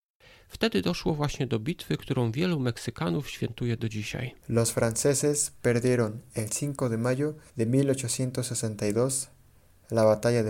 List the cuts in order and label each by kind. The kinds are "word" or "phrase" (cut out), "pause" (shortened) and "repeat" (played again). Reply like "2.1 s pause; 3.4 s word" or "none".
4.4 s pause; 7.5 s pause